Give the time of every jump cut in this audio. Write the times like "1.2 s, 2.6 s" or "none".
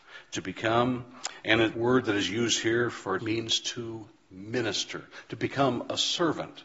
1.7 s, 3.2 s